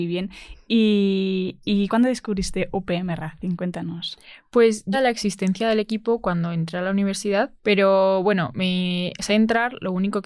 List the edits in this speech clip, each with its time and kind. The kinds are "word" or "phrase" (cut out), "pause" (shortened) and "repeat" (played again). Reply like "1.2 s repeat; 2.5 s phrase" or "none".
1.9 s word; 4.9 s phrase; 7.6 s pause; 9.3 s word